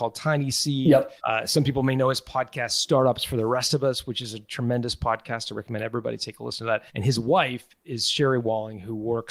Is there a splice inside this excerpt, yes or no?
yes